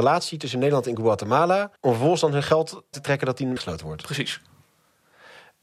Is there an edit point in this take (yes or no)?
yes